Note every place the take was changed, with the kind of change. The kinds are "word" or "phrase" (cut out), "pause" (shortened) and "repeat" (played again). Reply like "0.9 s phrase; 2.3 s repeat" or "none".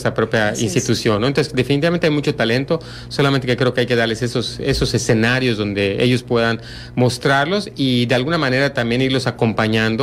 none